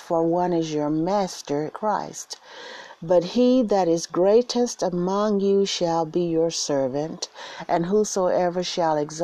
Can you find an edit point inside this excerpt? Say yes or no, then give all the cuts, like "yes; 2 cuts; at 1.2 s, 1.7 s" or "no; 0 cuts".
yes; 1 cut; at 1.7 s